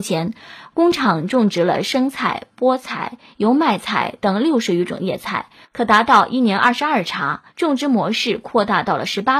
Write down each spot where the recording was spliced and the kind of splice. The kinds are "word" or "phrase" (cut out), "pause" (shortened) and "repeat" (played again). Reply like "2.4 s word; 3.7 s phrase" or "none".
7.5 s pause